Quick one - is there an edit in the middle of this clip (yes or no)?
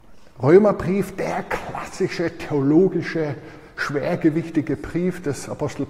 no